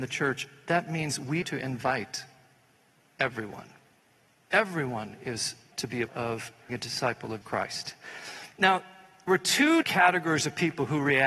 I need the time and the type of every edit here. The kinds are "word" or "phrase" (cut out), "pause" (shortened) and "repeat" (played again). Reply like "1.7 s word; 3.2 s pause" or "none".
1.4 s word; 5.7 s word; 6.1 s word; 6.7 s word; 7.4 s word; 9.3 s word; 9.8 s word

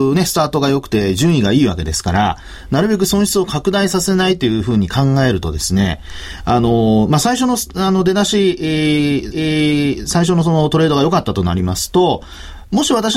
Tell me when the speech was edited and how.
9.3 s repeat

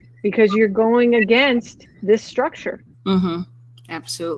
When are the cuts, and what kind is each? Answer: 2.9 s pause

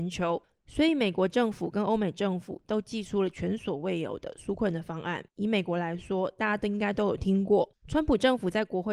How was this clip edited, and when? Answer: 5.3 s pause

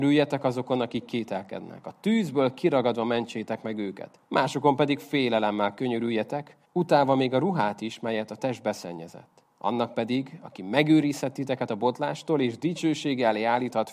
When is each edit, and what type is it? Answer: 4.2 s pause; 6.7 s pause; 9.5 s pause

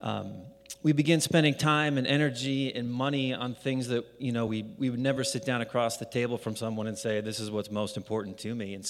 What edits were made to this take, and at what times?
none

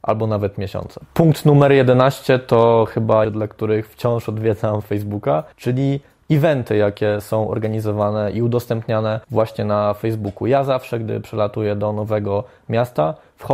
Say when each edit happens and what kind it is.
3.2 s phrase; 5.5 s pause; 9.2 s pause

